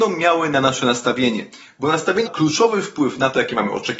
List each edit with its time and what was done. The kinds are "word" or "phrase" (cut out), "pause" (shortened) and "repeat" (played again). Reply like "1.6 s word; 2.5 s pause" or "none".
2.3 s word